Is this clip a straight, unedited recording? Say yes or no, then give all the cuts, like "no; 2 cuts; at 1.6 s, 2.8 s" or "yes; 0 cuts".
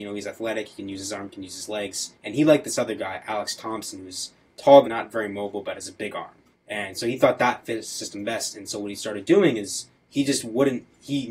no; 4 cuts; at 2.1 s, 4.8 s, 6.5 s, 9.9 s